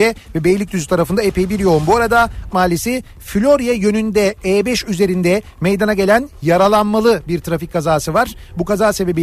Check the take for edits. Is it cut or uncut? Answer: cut